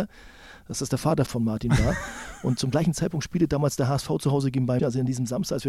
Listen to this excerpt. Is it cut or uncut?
cut